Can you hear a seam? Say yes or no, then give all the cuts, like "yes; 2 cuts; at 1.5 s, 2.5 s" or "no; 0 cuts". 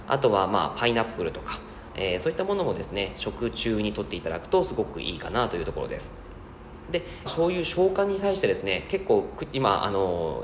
yes; 1 cut; at 7.3 s